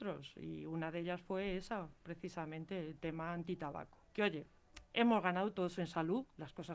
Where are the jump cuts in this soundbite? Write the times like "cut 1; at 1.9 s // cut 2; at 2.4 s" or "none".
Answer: cut 1; at 4.0 s // cut 2; at 4.9 s